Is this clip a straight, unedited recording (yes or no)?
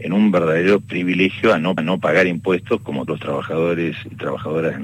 no